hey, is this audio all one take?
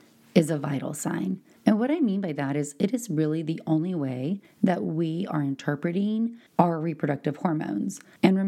no; 1 cut; at 6.5 s

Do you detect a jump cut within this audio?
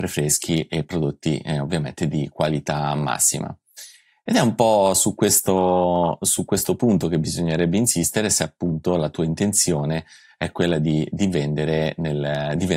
no; 0 cuts

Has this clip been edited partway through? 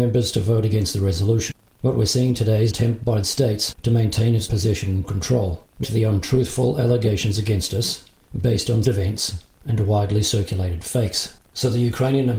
yes; 6 cuts; at 2.7 s, 3.2 s, 4.5 s, 5.0 s, 5.8 s, 8.8 s

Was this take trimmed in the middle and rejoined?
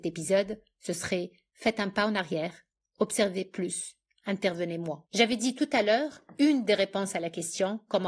yes; 1 cut; at 5.0 s

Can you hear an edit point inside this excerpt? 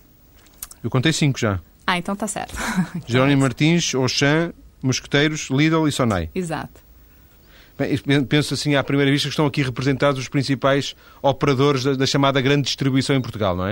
no; 0 cuts

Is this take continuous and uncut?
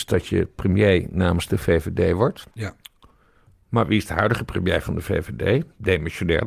no; 1 cut; at 2.5 s

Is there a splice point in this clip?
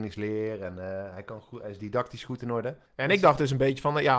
yes; 1 cut; at 2.9 s

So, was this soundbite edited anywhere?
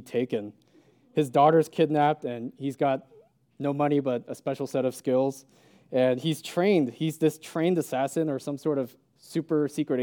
no; 0 cuts

